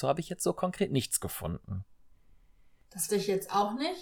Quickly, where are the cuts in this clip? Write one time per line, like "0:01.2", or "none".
0:03.1